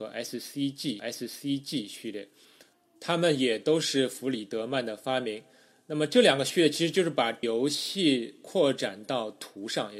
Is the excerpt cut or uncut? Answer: cut